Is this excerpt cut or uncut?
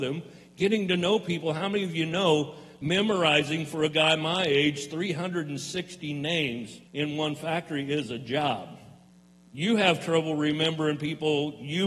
cut